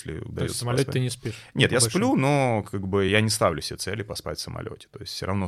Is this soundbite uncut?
yes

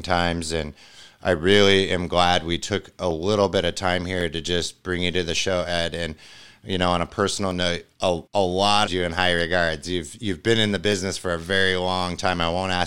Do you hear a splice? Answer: yes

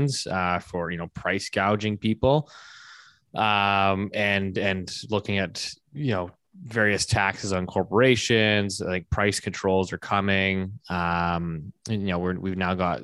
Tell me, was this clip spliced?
no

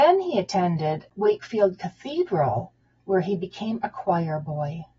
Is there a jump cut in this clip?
no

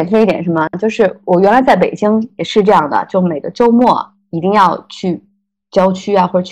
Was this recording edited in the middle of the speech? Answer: no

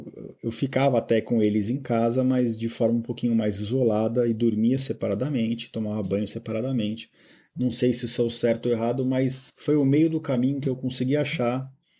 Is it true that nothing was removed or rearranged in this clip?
no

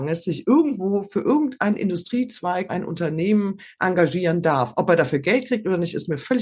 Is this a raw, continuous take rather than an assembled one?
no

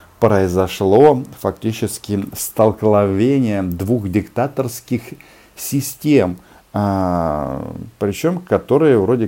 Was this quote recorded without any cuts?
yes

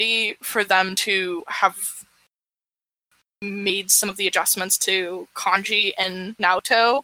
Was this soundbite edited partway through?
no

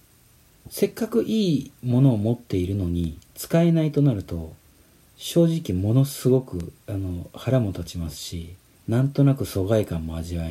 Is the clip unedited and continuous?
no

